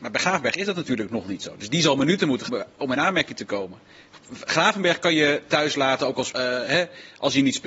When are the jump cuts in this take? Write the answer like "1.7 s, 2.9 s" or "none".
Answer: 2.5 s, 6.3 s